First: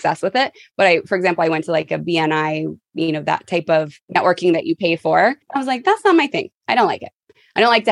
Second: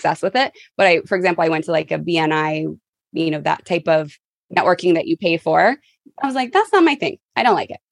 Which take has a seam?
first; 3 cuts; at 2.9 s, 4.0 s, 5.4 s

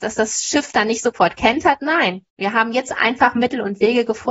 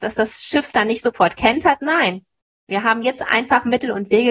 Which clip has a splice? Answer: first; 1 cut; at 2.3 s

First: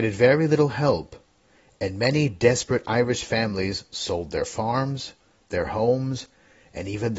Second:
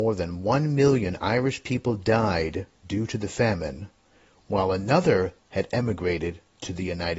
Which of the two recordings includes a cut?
second; 1 cut; at 5.4 s

